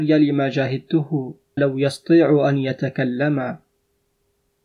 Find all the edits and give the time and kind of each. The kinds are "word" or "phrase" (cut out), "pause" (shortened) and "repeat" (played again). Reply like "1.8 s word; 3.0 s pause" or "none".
1.6 s word